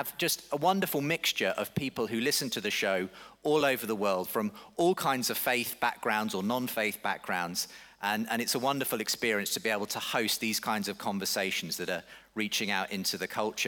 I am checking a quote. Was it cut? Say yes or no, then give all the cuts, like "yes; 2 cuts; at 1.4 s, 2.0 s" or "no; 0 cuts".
no; 0 cuts